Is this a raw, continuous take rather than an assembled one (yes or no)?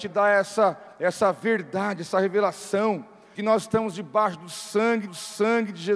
no